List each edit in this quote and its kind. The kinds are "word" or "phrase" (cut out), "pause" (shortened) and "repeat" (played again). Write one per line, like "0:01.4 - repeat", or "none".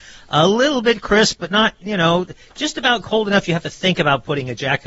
none